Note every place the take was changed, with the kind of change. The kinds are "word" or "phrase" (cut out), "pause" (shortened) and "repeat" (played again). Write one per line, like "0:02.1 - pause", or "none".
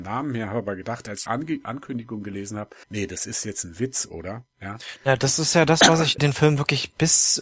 0:01.3 - phrase
0:02.8 - pause
0:04.5 - pause
0:06.2 - phrase